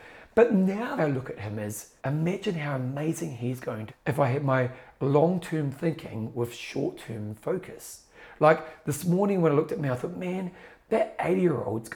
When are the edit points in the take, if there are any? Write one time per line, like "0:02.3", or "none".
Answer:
0:01.0
0:02.0
0:03.9

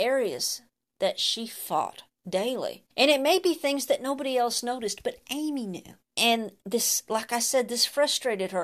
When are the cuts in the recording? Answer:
0:02.9
0:06.0

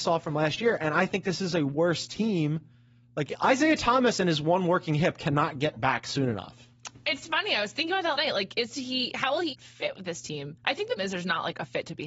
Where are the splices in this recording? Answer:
0:08.1
0:09.5
0:11.0

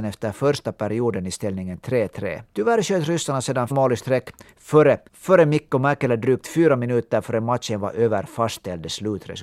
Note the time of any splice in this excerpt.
0:02.5
0:03.7
0:05.1

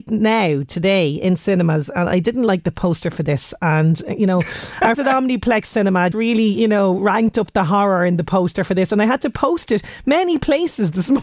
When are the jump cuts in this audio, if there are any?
0:04.9
0:06.1

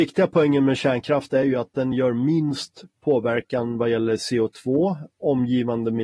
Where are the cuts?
none

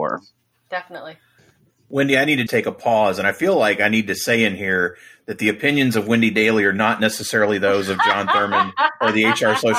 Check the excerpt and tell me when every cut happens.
0:02.5

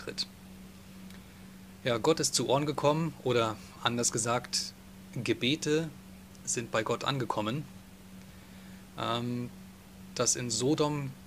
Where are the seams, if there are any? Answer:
none

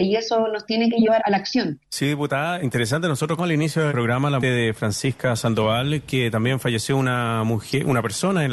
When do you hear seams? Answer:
0:01.2
0:01.8
0:02.6
0:03.4
0:03.9
0:04.4

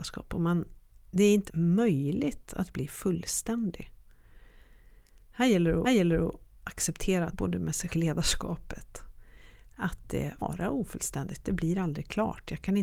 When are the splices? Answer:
0:01.5
0:05.8
0:07.3
0:07.9
0:10.4

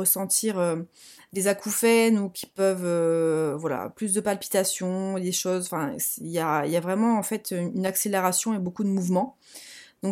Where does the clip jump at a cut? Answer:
none

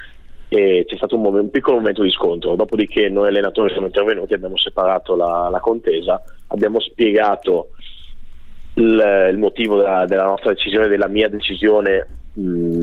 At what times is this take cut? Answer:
none

